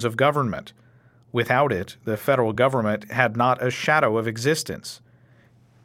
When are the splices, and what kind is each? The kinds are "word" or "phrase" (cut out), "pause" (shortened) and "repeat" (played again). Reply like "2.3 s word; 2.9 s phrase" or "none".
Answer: none